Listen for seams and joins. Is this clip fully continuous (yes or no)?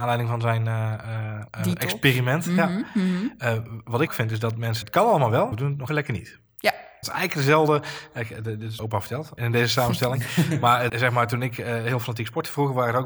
no